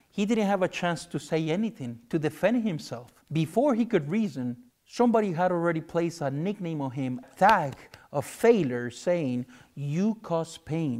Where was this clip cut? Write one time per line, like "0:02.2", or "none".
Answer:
0:03.2
0:04.7
0:07.2